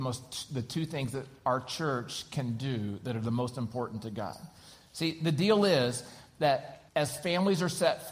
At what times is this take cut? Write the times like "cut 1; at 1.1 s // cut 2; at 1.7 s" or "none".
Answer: cut 1; at 6.9 s